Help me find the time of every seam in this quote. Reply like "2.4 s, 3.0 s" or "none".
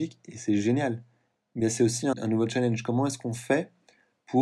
2.1 s